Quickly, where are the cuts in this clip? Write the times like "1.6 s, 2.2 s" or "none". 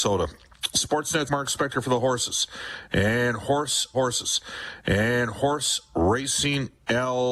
1.3 s, 3.9 s